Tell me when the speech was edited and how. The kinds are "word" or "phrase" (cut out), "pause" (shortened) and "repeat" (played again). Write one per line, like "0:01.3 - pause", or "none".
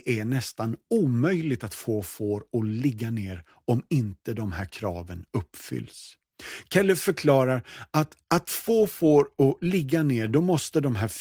0:08.2 - pause